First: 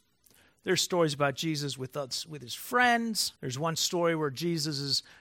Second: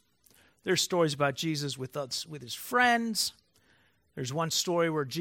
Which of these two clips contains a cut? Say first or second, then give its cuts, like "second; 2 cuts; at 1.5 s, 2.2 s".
first; 1 cut; at 3.4 s